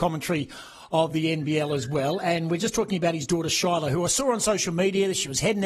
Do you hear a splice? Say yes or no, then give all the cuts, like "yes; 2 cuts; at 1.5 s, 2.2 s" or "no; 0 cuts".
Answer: no; 0 cuts